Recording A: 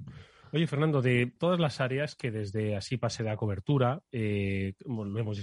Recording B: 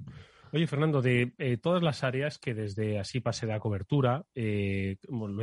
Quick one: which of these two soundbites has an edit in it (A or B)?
A